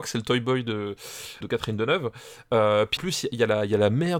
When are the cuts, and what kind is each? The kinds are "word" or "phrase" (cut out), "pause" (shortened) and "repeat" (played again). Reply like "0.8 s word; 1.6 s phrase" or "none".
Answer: 1.4 s word; 3.0 s word